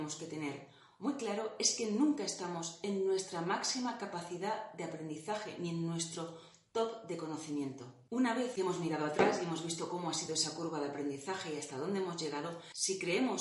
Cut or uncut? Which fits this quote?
uncut